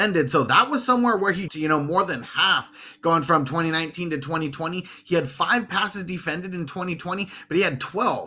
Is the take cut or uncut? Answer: cut